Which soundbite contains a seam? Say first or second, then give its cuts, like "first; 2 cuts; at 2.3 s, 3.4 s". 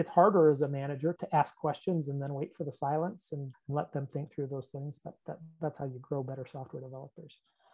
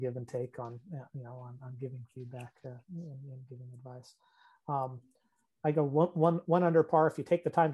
first; 2 cuts; at 1.2 s, 3.5 s